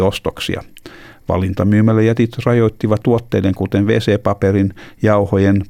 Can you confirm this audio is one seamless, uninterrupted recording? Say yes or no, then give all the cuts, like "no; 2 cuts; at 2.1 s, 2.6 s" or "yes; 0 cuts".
no; 1 cut; at 3.0 s